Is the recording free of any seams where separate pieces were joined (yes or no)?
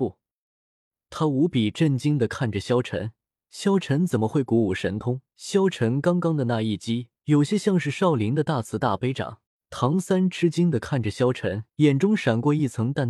no